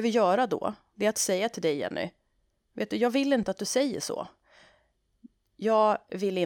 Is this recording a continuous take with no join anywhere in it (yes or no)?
yes